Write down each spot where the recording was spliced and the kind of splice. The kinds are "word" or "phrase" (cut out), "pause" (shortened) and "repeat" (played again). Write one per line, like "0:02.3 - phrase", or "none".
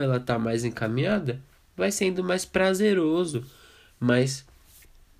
none